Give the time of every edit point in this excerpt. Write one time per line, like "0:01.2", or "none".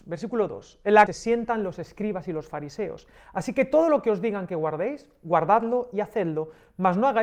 0:01.1